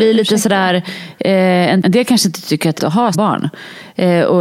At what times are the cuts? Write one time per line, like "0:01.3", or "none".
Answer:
0:01.8
0:02.8
0:03.1